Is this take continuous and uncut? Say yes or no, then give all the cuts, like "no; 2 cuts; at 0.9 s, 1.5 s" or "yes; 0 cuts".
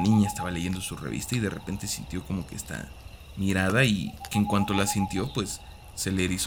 yes; 0 cuts